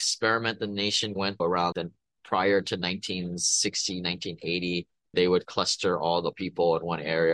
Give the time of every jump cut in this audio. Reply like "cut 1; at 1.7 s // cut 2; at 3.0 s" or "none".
cut 1; at 1.4 s // cut 2; at 1.7 s // cut 3; at 5.1 s // cut 4; at 5.4 s // cut 5; at 6.3 s